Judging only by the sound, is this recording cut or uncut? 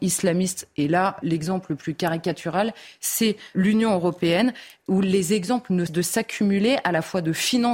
cut